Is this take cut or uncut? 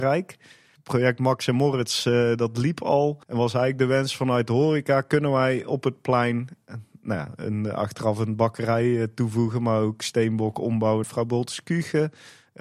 cut